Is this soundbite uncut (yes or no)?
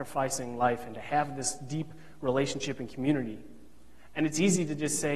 yes